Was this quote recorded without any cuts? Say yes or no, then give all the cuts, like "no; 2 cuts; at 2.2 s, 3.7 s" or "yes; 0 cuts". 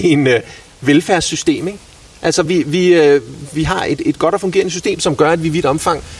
yes; 0 cuts